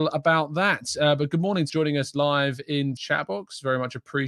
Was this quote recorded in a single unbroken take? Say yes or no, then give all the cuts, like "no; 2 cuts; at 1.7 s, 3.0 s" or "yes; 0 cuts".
no; 2 cuts; at 1.7 s, 3.0 s